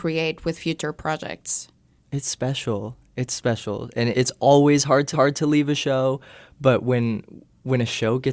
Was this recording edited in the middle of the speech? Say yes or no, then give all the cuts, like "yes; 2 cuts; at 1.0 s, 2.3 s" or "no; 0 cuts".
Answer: yes; 3 cuts; at 2.0 s, 4.1 s, 5.1 s